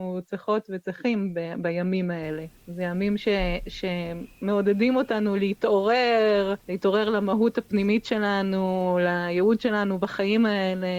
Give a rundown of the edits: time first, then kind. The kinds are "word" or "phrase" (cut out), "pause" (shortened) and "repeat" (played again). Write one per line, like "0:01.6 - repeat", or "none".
0:02.6 - pause
0:04.3 - pause
0:06.6 - pause